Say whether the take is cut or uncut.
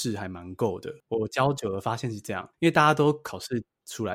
cut